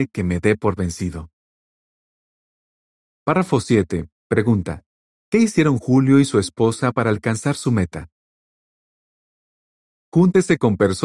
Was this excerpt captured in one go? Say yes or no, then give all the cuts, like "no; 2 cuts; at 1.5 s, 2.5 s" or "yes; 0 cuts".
yes; 0 cuts